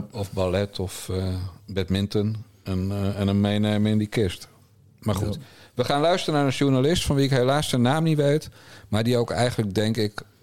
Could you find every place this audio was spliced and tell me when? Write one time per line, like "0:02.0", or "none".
none